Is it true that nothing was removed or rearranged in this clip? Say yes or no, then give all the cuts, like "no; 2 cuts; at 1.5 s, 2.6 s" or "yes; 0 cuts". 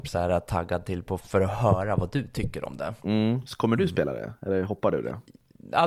no; 2 cuts; at 1.2 s, 3.0 s